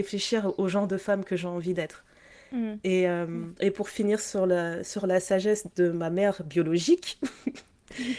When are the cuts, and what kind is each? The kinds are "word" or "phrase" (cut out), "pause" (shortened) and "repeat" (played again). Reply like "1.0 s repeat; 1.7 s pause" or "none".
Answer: 3.6 s pause